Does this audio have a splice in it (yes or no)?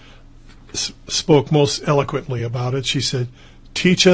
no